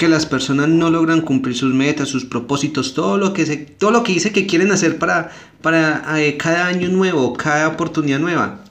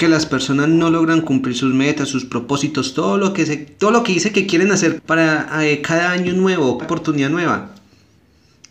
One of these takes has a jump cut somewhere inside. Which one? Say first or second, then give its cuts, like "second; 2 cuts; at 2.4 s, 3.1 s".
second; 2 cuts; at 5.0 s, 6.8 s